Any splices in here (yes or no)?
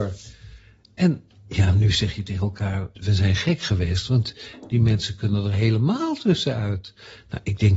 yes